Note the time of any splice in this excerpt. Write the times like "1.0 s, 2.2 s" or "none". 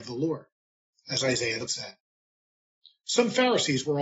1.7 s